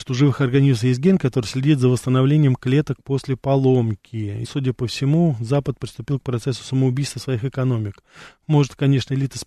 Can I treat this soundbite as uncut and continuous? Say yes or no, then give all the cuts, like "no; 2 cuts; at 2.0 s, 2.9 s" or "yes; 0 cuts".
no; 1 cut; at 4.4 s